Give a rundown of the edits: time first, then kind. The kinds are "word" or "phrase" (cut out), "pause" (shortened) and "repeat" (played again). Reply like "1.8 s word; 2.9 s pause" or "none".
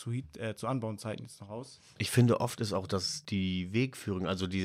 none